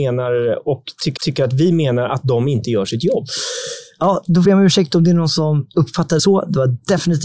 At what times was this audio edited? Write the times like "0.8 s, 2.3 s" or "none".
1.2 s, 4.4 s, 6.2 s